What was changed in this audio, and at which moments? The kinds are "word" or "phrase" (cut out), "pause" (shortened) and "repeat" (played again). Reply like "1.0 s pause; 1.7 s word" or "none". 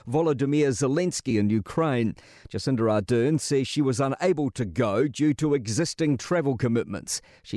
none